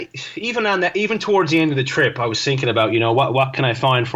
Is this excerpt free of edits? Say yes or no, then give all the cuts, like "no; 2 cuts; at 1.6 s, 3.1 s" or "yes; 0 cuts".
yes; 0 cuts